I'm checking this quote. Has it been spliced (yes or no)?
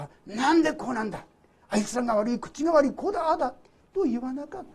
no